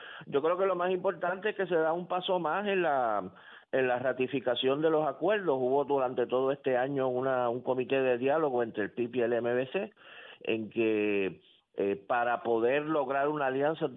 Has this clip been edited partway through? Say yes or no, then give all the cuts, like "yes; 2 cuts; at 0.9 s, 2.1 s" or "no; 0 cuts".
no; 0 cuts